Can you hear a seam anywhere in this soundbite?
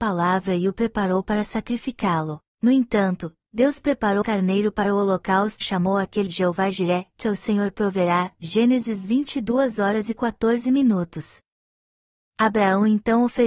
yes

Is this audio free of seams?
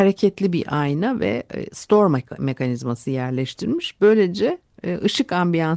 yes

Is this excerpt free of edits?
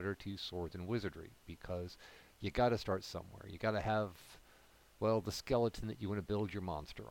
yes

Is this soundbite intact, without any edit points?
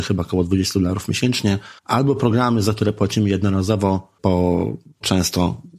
no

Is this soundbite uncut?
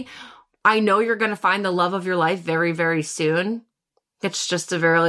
yes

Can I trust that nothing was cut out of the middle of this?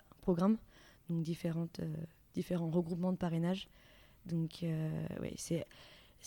yes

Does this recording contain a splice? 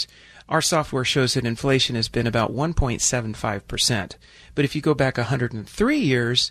no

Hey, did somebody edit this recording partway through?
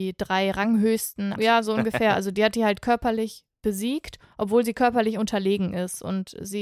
yes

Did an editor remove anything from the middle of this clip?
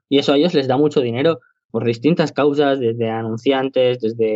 yes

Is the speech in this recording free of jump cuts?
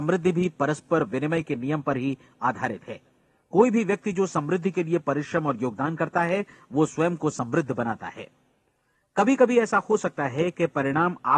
yes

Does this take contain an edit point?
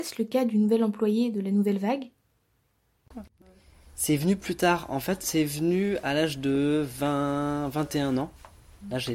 no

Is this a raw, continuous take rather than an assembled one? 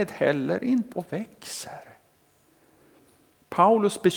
no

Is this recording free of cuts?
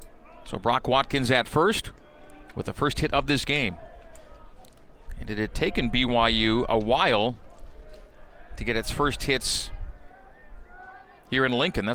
yes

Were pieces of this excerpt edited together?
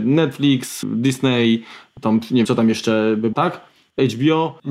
yes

